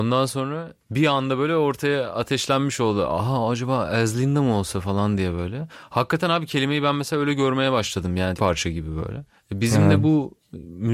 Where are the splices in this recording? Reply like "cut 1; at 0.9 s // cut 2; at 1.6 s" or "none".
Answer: cut 1; at 8.4 s